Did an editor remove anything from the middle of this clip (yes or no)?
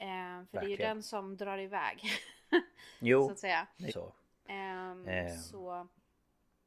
yes